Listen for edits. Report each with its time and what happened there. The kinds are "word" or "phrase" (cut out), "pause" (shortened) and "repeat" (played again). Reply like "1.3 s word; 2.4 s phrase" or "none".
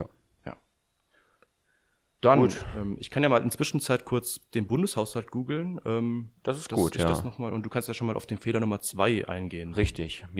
none

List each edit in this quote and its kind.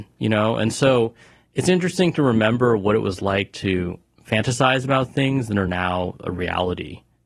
none

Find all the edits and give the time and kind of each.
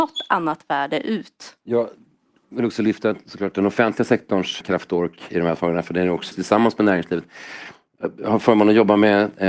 1.6 s pause; 4.6 s word; 6.3 s phrase

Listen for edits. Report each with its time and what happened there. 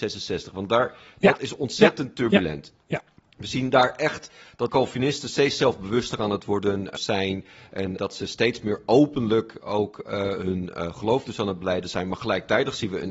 4.7 s word; 7.0 s word; 8.0 s word

